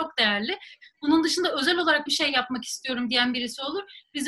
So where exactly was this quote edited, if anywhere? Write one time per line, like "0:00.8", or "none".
0:02.1